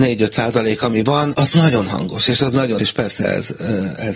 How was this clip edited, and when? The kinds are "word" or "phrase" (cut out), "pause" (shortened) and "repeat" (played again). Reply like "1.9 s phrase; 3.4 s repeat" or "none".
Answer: 1.3 s word; 2.8 s word